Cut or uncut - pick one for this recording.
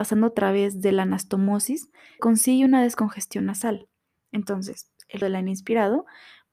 cut